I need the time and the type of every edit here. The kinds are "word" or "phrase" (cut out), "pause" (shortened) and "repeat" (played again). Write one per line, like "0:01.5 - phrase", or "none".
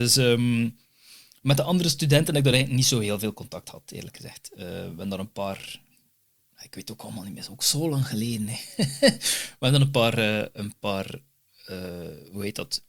none